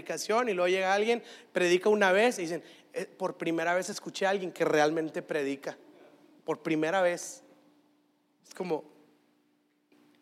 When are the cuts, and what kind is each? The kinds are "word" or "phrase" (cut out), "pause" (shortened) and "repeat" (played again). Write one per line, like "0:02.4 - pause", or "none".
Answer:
none